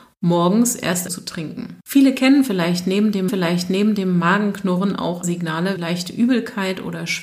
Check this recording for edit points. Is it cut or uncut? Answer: cut